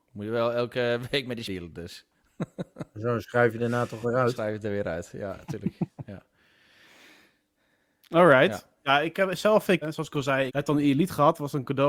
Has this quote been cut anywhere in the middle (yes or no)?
yes